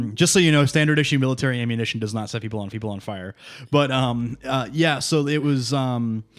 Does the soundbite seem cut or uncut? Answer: cut